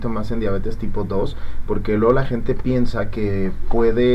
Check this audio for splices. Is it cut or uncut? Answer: uncut